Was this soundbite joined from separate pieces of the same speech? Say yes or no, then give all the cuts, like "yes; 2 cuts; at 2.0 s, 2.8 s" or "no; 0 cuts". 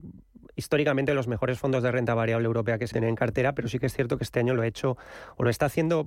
yes; 1 cut; at 2.9 s